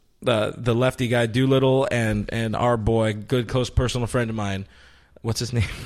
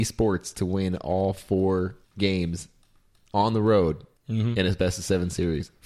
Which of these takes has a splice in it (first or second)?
second